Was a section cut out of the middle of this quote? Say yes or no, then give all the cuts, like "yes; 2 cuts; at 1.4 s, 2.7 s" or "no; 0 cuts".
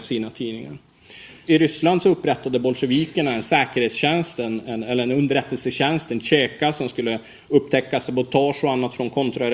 no; 0 cuts